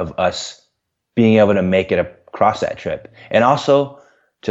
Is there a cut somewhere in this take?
no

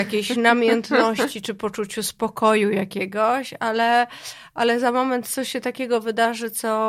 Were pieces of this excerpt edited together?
no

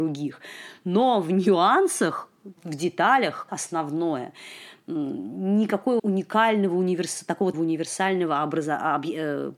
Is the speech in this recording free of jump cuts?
no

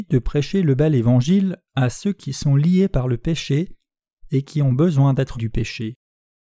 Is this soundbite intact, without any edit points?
no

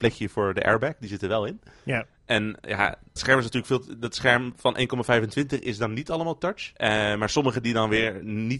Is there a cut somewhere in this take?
yes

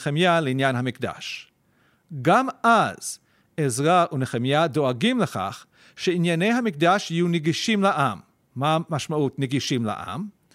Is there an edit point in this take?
no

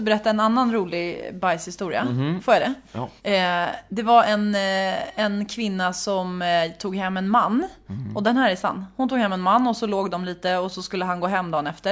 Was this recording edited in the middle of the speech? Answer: yes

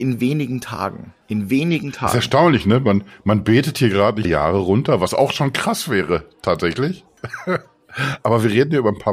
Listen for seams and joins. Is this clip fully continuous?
no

